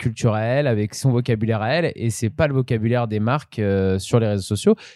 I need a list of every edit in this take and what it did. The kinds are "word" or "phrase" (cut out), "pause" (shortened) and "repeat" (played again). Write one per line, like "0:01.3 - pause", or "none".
none